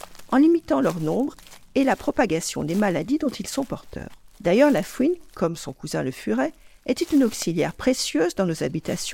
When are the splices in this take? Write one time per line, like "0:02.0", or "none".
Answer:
0:04.3